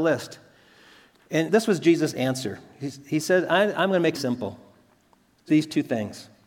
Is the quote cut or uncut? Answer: cut